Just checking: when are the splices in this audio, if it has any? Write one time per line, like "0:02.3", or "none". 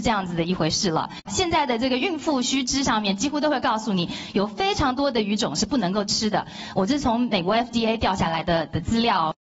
none